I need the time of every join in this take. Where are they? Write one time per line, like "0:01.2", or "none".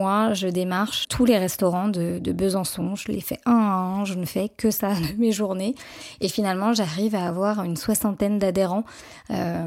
0:01.0